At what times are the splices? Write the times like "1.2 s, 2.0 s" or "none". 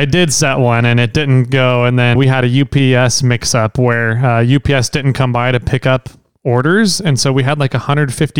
2.2 s